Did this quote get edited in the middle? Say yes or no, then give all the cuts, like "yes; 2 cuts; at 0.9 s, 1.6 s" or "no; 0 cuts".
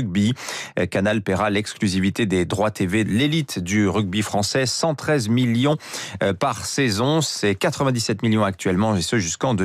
yes; 1 cut; at 3.1 s